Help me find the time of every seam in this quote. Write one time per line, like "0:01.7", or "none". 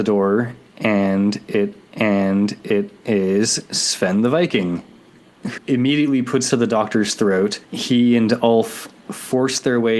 0:01.9
0:05.6
0:06.5
0:07.6

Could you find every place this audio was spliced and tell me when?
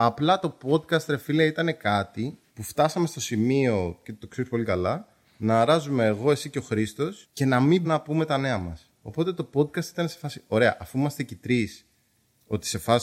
0:02.5
0:07.2
0:07.8
0:08.9

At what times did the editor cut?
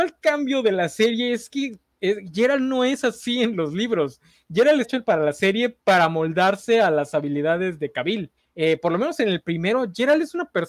0:04.8
0:05.8
0:08.4

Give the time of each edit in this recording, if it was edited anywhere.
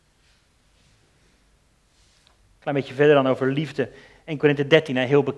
none

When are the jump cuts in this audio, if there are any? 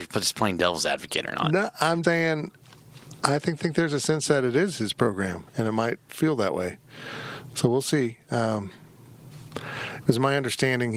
0:02.0
0:03.6
0:06.1

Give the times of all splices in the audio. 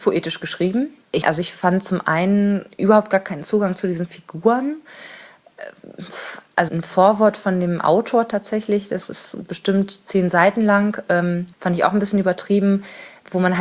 0:01.2
0:06.7
0:11.5

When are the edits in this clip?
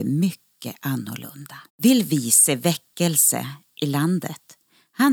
0:01.7

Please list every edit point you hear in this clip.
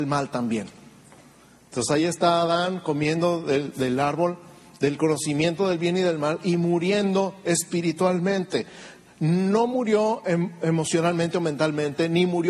none

